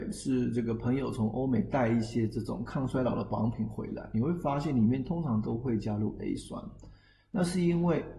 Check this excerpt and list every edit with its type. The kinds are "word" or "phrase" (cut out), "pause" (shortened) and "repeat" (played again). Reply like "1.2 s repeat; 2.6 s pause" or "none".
none